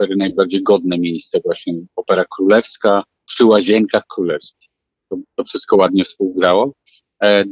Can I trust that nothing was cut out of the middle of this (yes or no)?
yes